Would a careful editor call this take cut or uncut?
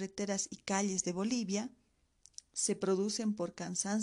uncut